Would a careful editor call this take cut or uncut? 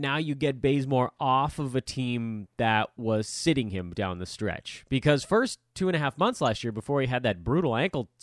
cut